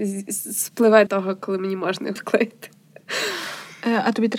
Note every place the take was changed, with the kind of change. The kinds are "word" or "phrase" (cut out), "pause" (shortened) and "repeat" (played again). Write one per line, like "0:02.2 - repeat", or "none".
0:01.1 - word
0:02.2 - word

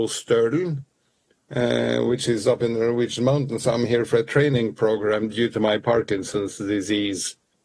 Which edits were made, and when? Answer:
none

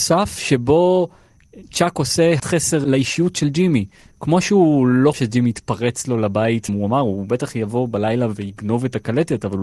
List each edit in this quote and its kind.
0:02.4 - word
0:05.1 - word
0:06.7 - word

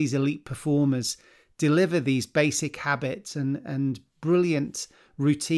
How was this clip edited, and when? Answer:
none

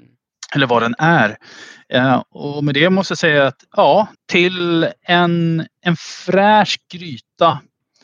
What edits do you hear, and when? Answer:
0:04.1 - pause

